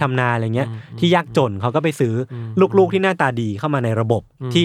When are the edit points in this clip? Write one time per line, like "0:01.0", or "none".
none